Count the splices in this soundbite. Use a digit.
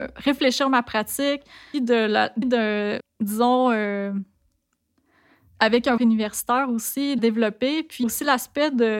6